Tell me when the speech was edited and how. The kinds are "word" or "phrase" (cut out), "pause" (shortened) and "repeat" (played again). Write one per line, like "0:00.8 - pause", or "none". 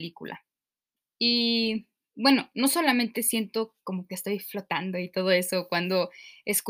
0:01.0 - pause